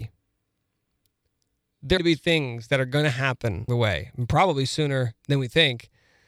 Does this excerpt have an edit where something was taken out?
yes; 3 cuts; at 2.0 s, 3.7 s, 5.2 s

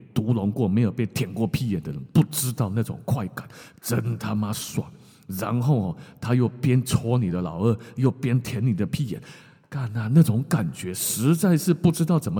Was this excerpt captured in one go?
yes; 0 cuts

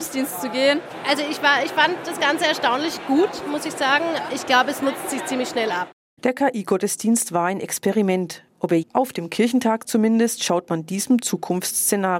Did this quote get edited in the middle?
yes; 2 cuts; at 4.3 s, 8.8 s

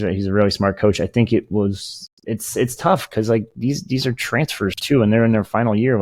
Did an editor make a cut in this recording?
no; 0 cuts

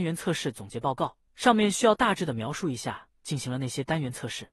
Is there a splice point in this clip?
yes; 1 cut; at 1.3 s

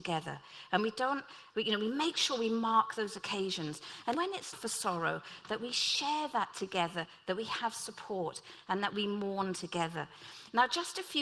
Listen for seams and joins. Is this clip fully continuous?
no; 3 cuts; at 1.5 s, 4.1 s, 4.5 s

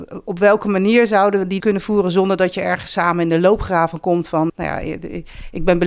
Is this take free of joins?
no; 2 cuts; at 1.6 s, 4.5 s

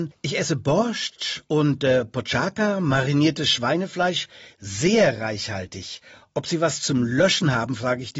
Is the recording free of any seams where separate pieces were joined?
yes; 0 cuts

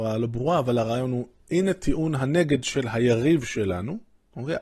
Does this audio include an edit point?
no; 0 cuts

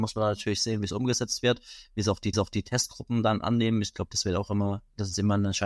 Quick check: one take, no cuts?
no; 1 cut; at 2.3 s

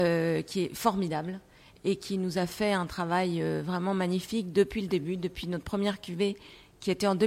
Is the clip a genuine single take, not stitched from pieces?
yes; 0 cuts

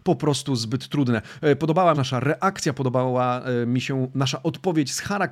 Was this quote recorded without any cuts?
no; 1 cut; at 1.9 s

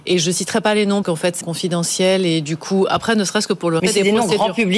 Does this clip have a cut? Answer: yes; 3 cuts; at 1.0 s, 1.4 s, 3.8 s

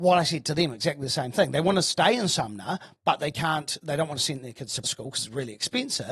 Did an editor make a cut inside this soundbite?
yes; 1 cut; at 4.8 s

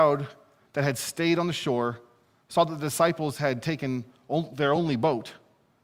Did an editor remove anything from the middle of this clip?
no; 0 cuts

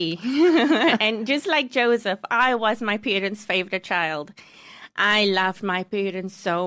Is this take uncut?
yes; 0 cuts

